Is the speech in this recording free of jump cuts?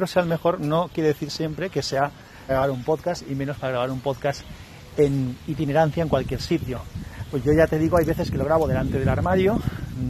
no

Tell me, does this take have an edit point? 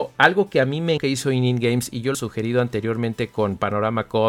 yes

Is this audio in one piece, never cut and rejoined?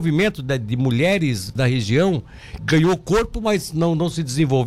no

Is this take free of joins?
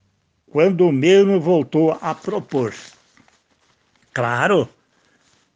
yes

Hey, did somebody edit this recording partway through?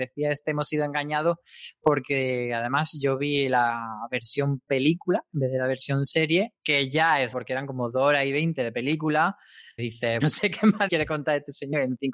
yes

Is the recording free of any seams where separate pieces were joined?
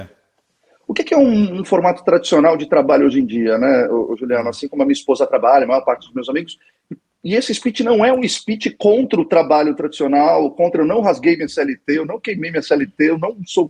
yes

